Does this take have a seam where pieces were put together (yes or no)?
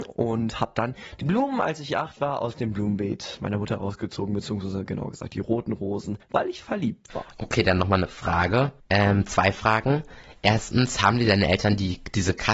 yes